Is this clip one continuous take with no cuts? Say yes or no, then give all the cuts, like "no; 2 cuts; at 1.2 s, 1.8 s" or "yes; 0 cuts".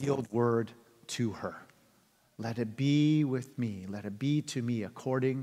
yes; 0 cuts